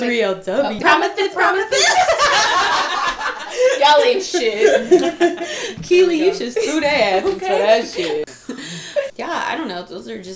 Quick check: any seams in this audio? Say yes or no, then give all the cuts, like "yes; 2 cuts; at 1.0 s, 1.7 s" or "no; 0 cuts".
yes; 1 cut; at 9.1 s